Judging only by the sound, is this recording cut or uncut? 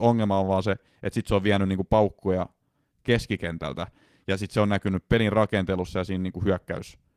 uncut